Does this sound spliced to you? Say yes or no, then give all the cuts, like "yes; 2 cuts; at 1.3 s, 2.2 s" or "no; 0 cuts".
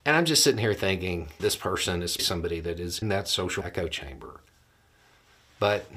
yes; 4 cuts; at 1.4 s, 2.2 s, 3.0 s, 3.6 s